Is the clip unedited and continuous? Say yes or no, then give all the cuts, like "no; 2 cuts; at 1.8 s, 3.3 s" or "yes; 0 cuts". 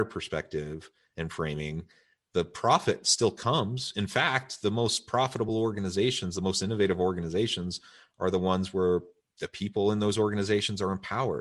yes; 0 cuts